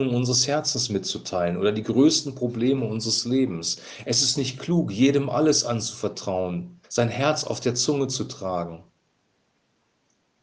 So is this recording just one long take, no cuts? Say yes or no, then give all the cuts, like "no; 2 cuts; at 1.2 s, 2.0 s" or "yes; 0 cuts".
no; 1 cut; at 6.8 s